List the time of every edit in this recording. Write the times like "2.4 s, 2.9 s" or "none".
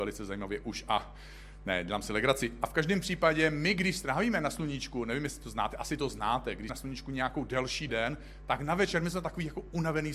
6.7 s, 7.9 s